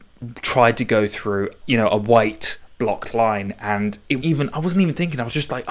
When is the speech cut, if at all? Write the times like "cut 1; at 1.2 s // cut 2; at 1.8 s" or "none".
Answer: cut 1; at 1.6 s // cut 2; at 4.2 s